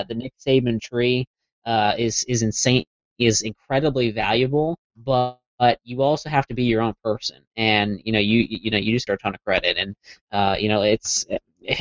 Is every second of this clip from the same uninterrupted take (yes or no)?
no